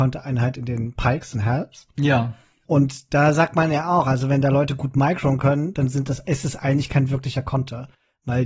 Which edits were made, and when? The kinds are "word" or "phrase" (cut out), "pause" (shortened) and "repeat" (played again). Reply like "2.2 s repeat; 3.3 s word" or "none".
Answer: none